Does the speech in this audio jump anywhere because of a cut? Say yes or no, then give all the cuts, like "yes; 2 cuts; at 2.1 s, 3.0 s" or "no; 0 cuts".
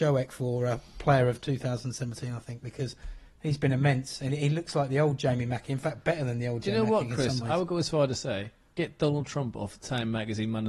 no; 0 cuts